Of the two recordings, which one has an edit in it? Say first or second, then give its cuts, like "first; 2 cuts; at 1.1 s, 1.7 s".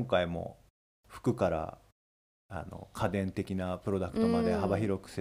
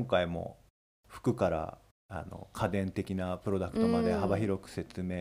second; 1 cut; at 1.9 s